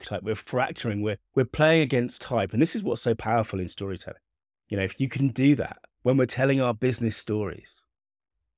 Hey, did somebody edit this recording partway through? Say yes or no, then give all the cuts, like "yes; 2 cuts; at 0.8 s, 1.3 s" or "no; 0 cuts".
yes; 3 cuts; at 1.3 s, 4.4 s, 5.9 s